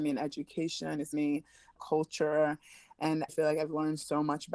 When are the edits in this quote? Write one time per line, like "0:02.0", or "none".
0:01.1
0:01.8
0:03.3

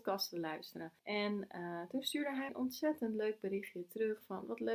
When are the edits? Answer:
0:01.0
0:02.5

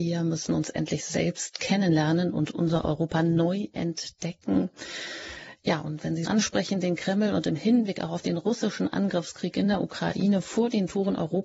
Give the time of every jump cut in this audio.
0:06.3

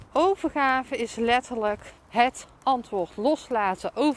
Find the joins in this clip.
0:02.0

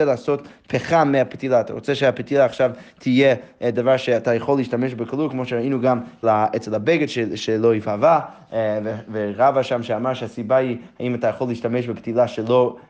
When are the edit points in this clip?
0:06.2

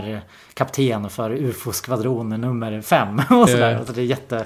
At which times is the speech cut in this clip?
0:03.5

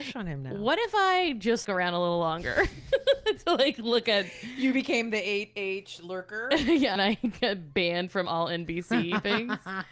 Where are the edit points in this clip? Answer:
0:01.6
0:07.0

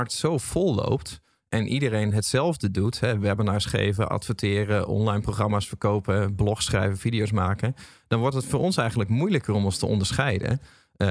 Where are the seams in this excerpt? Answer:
none

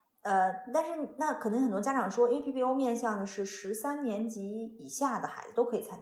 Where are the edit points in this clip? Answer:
none

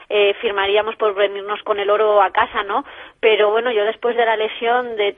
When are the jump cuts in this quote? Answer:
0:01.6

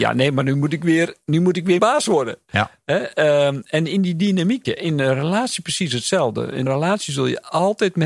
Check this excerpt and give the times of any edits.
0:01.8
0:04.6
0:06.7

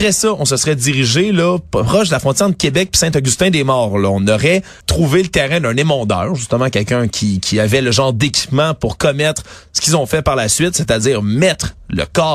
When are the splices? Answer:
0:04.8

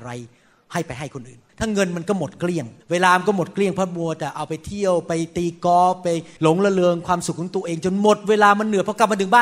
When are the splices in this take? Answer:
0:01.5
0:02.8
0:06.4

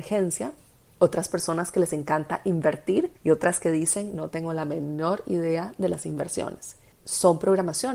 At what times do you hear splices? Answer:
0:03.2
0:06.9

